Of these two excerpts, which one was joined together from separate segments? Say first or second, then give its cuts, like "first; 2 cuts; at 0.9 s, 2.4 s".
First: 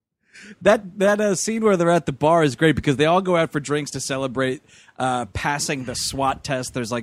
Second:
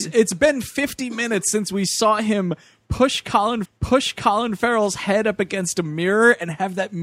second; 1 cut; at 3.7 s